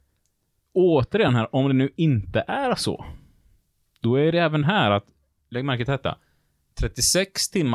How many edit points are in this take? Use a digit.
0